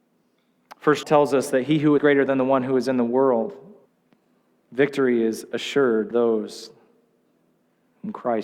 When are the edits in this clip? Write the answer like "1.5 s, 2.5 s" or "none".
1.0 s, 2.0 s, 3.9 s, 6.1 s

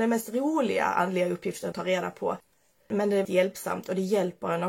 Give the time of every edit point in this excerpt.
1.7 s, 3.2 s

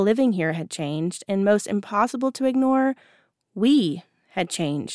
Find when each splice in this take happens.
none

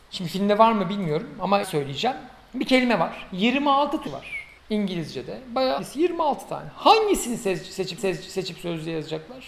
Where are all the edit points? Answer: 1.6 s, 4.1 s, 4.6 s, 5.8 s, 8.0 s

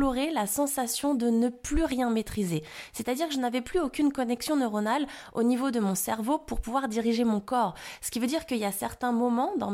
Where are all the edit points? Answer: none

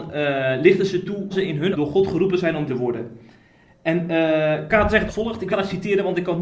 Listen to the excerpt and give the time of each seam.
1.3 s, 1.7 s, 2.7 s, 4.7 s, 5.1 s, 5.5 s

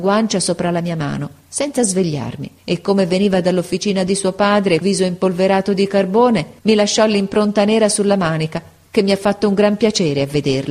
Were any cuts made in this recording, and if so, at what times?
2.6 s, 4.8 s, 6.6 s

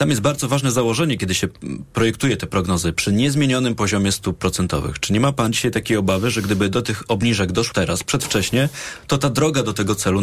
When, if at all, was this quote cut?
7.7 s

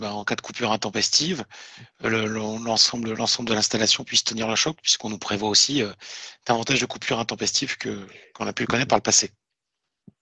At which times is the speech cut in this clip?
4.0 s

